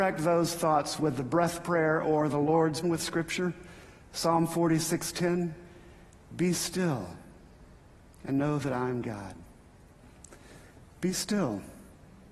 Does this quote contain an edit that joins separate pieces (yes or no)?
yes